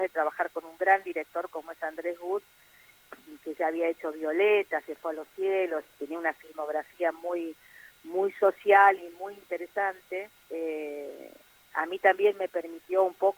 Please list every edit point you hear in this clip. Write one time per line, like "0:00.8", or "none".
0:10.4